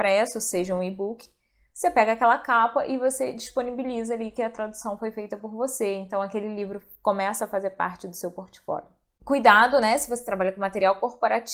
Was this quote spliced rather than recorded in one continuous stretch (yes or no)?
no